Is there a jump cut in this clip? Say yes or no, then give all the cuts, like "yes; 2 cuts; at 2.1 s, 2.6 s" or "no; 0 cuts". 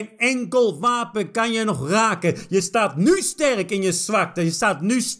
no; 0 cuts